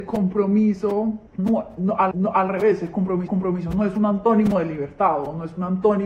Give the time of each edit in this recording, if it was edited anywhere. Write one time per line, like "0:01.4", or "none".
0:01.3
0:02.1
0:03.3